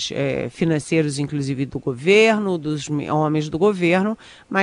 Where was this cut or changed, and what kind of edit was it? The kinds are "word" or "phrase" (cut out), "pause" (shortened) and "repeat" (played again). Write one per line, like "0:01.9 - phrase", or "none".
none